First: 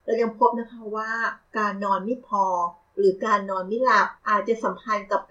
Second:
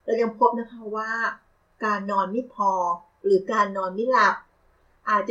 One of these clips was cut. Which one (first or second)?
first